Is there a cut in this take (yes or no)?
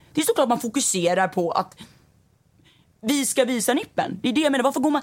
no